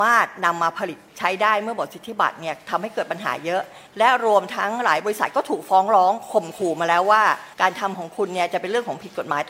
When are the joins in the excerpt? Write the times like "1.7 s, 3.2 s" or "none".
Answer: 1.1 s, 3.9 s, 7.5 s